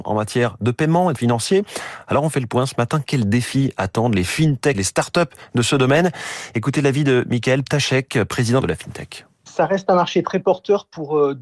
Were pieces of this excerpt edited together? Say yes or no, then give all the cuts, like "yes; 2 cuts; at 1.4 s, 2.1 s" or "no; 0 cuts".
yes; 3 cuts; at 1.2 s, 4.7 s, 8.6 s